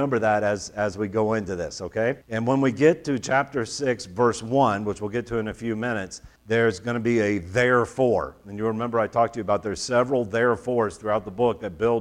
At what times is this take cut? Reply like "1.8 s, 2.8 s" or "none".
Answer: 2.2 s, 6.4 s